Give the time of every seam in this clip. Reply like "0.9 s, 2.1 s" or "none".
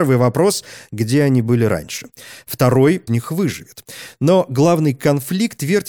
3.1 s